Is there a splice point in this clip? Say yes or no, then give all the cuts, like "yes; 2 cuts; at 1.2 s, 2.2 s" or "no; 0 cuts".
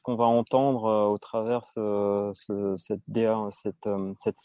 no; 0 cuts